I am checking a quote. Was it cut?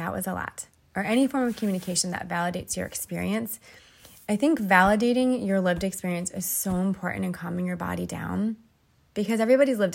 no; 0 cuts

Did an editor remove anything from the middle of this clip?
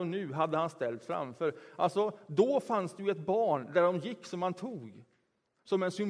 no; 0 cuts

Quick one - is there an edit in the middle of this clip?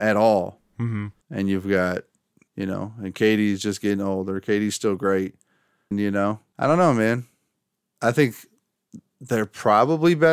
yes; 3 cuts; at 1.2 s, 2.5 s, 5.9 s

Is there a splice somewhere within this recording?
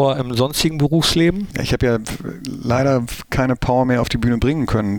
no; 0 cuts

